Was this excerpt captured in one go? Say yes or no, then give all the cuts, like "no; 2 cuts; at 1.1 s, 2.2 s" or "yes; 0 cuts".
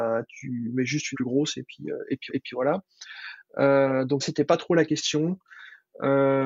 no; 3 cuts; at 1.1 s, 2.3 s, 4.2 s